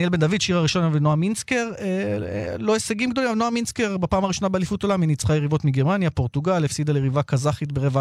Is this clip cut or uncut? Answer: uncut